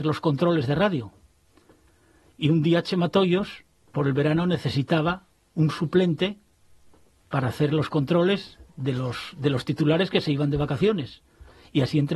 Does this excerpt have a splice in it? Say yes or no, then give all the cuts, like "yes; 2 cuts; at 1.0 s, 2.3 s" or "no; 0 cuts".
no; 0 cuts